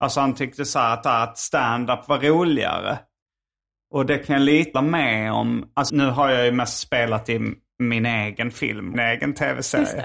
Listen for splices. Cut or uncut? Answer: cut